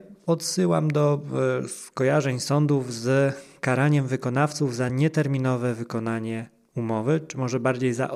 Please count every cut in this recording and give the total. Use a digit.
0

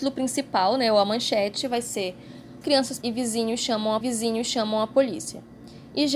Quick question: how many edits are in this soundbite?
3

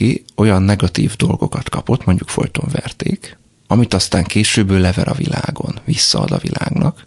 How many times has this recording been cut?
0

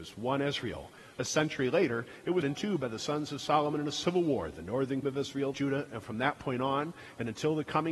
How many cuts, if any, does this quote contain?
3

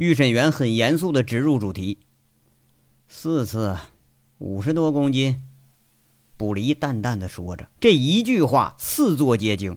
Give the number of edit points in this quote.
1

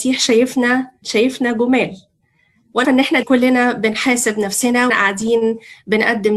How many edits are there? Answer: 4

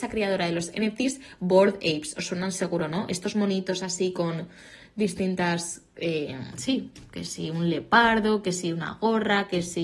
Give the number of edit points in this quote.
0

